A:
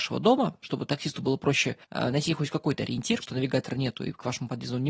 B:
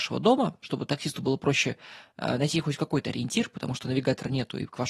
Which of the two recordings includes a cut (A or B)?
A